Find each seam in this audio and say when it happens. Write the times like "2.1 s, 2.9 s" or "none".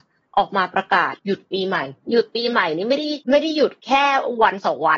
1.2 s, 2.0 s, 3.2 s